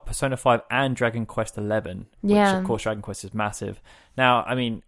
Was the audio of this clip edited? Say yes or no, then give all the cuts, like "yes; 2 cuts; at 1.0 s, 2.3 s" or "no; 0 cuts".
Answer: no; 0 cuts